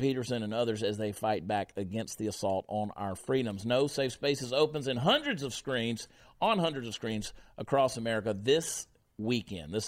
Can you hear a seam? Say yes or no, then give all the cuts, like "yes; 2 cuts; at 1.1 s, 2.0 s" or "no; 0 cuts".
no; 0 cuts